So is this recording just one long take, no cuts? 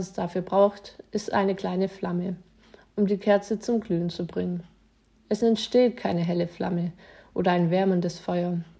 yes; 0 cuts

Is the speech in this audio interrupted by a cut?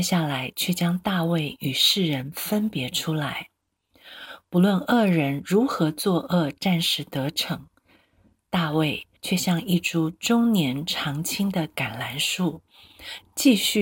yes; 1 cut; at 9.2 s

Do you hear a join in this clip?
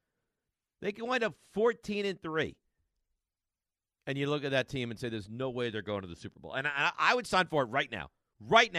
no; 0 cuts

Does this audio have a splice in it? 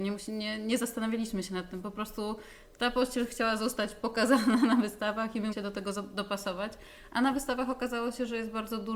yes; 1 cut; at 5.5 s

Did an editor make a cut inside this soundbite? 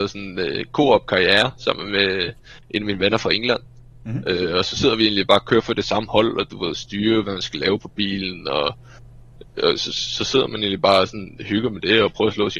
yes; 1 cut; at 7.2 s

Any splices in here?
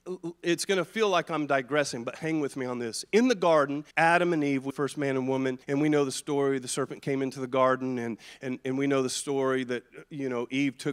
yes; 3 cuts; at 3.9 s, 4.7 s, 5.6 s

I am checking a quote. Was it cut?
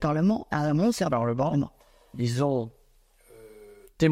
no; 0 cuts

